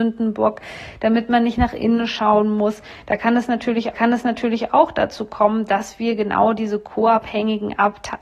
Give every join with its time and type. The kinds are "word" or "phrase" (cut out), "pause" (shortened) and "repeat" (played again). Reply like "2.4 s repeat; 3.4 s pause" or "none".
3.9 s repeat

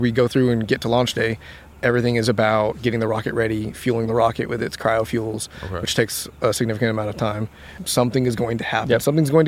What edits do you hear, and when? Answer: none

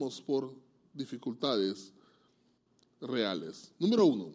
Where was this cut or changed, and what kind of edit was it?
none

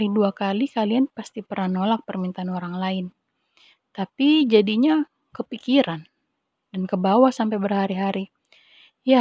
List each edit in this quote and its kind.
none

